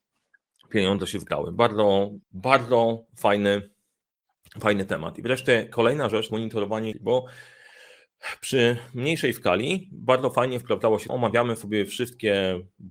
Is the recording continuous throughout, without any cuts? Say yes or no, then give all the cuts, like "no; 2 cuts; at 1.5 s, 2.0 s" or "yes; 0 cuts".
no; 4 cuts; at 2.2 s, 6.3 s, 6.9 s, 11.1 s